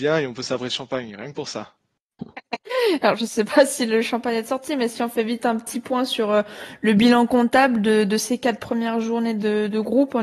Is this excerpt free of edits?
yes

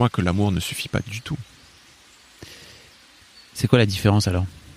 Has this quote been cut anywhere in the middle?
no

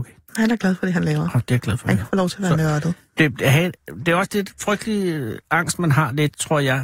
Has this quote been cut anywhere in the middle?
no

